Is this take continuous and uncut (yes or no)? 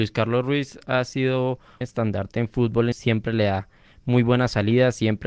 no